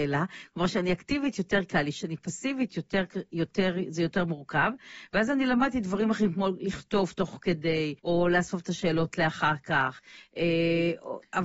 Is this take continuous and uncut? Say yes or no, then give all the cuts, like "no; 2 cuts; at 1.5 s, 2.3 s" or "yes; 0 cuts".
no; 1 cut; at 8.0 s